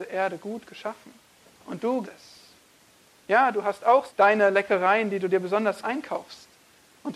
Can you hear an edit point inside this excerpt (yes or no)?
yes